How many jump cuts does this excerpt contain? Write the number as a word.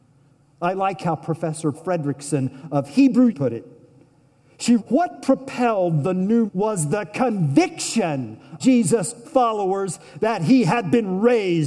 six